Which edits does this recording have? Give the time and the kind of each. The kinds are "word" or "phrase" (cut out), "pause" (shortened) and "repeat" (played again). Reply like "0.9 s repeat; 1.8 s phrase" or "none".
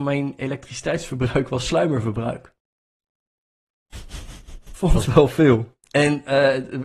5.0 s phrase